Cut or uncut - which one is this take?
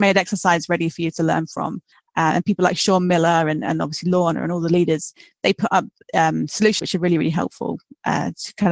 cut